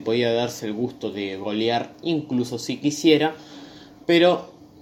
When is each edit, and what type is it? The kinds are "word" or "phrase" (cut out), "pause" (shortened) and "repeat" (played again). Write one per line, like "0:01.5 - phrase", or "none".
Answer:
none

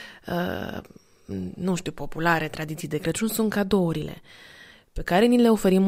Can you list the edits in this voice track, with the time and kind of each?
none

